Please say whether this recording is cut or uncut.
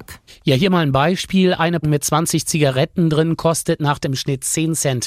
cut